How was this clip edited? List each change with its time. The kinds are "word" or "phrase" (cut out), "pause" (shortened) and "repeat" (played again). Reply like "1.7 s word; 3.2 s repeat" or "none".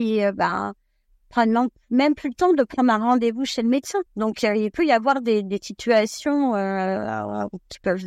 4.1 s pause